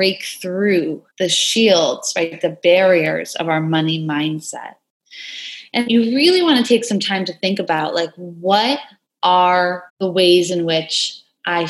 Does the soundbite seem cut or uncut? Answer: cut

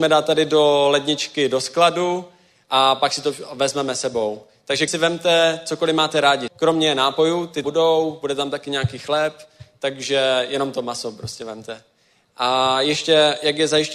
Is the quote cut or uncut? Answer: cut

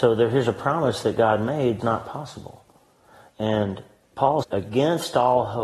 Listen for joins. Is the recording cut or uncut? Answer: cut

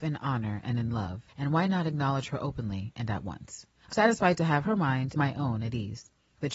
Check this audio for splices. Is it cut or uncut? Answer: cut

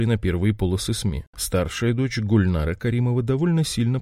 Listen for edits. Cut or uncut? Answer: cut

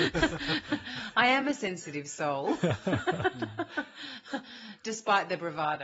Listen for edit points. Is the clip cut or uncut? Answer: uncut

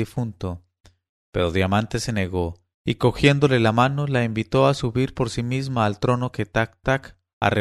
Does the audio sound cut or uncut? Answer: cut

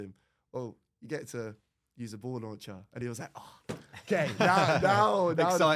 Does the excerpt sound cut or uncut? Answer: uncut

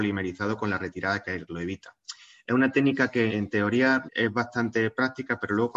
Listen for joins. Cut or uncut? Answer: cut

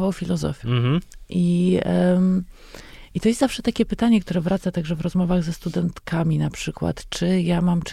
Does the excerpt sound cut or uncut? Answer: uncut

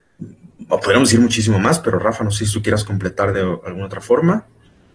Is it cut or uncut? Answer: uncut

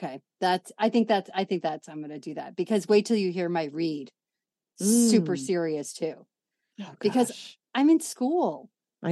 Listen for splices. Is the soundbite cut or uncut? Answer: uncut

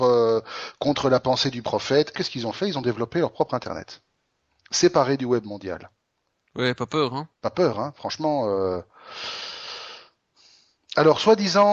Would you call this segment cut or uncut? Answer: cut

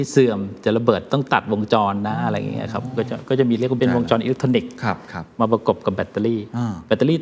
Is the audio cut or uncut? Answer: cut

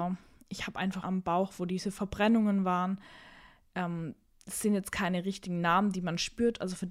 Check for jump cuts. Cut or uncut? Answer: cut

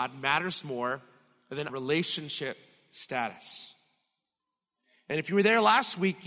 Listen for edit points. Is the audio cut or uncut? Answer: cut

